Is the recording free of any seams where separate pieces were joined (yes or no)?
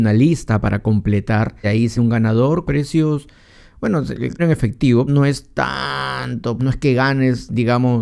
no